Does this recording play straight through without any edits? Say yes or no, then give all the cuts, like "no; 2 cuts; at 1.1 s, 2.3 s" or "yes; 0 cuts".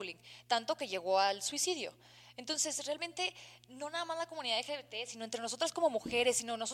yes; 0 cuts